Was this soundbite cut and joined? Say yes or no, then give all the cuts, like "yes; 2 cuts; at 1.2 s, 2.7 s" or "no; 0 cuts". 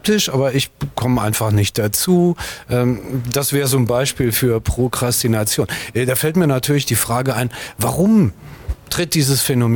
no; 0 cuts